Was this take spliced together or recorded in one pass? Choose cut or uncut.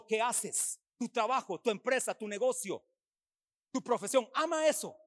uncut